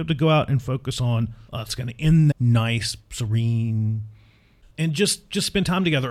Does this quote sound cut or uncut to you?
cut